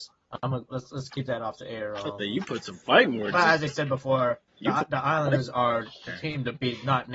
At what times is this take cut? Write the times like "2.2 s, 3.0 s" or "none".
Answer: 4.5 s